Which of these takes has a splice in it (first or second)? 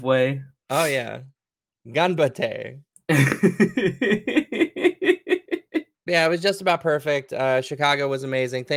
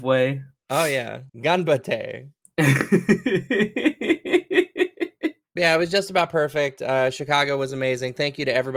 second